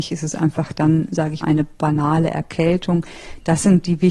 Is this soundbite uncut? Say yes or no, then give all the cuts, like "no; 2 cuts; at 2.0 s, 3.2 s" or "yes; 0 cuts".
no; 1 cut; at 1.4 s